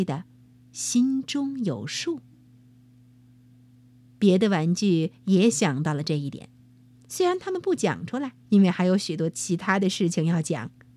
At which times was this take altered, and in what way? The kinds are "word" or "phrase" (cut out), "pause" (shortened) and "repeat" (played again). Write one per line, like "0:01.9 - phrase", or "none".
0:08.4 - pause